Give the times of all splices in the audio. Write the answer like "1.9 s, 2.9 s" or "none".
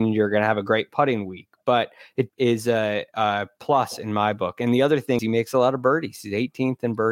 2.3 s, 5.2 s